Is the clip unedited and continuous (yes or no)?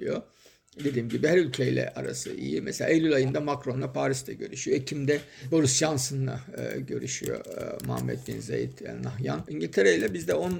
yes